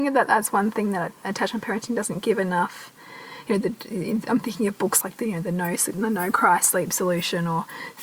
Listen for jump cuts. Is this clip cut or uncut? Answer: cut